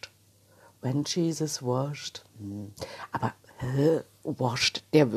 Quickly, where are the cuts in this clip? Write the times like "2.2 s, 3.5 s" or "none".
none